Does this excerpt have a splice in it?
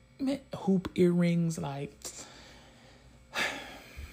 no; 0 cuts

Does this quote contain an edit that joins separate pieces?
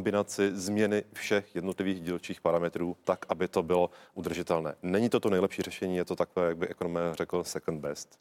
no; 0 cuts

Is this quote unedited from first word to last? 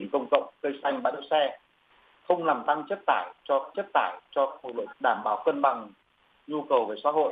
no; 2 cuts; at 3.7 s, 4.9 s

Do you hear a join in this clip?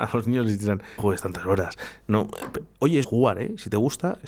yes; 2 cuts; at 1.0 s, 3.0 s

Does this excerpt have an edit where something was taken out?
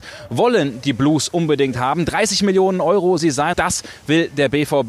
yes; 2 cuts; at 3.2 s, 3.5 s

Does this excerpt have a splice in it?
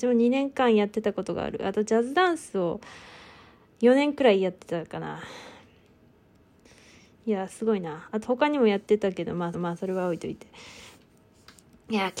yes; 1 cut; at 9.5 s

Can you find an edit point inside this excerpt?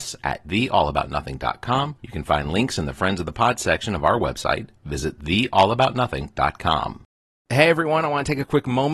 no; 0 cuts

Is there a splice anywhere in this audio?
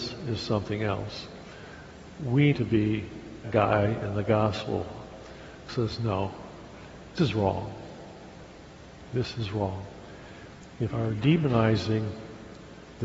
yes; 5 cuts; at 2.5 s, 3.4 s, 5.7 s, 7.2 s, 10.9 s

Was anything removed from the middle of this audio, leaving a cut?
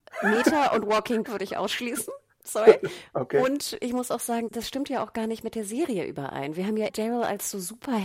yes; 3 cuts; at 1.2 s, 4.5 s, 6.9 s

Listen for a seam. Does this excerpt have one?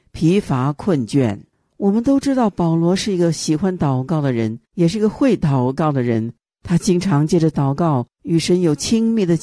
yes; 2 cuts; at 4.6 s, 8.1 s

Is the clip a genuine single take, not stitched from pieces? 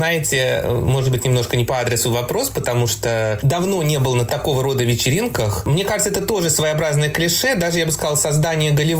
yes; 0 cuts

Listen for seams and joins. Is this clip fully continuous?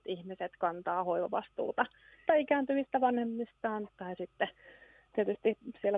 no; 2 cuts; at 2.3 s, 3.9 s

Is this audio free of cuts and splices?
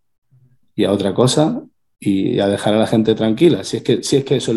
yes; 0 cuts

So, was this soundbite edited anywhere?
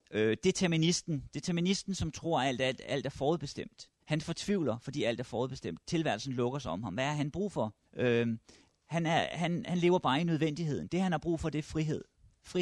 yes; 2 cuts; at 4.0 s, 7.8 s

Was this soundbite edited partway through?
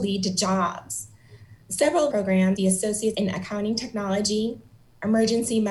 yes; 4 cuts; at 1.6 s, 2.1 s, 2.6 s, 3.1 s

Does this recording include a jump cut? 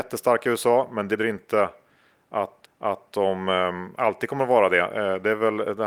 yes; 2 cuts; at 1.2 s, 2.6 s

